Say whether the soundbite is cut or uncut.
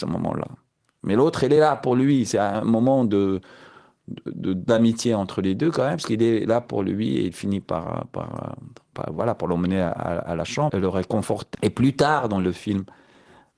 cut